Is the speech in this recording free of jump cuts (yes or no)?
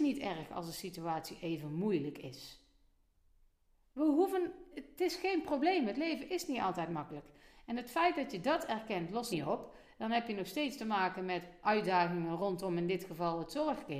no